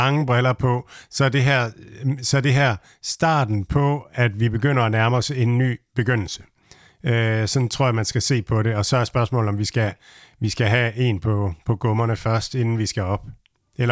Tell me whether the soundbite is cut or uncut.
uncut